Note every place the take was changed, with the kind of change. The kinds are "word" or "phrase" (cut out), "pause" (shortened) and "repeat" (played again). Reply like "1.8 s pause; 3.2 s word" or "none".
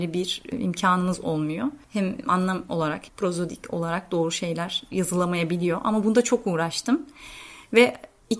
3.1 s word